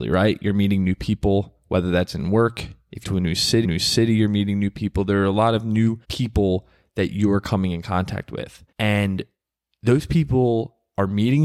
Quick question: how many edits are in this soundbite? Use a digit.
4